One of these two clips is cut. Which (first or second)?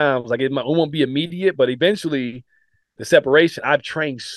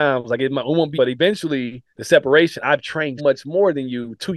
second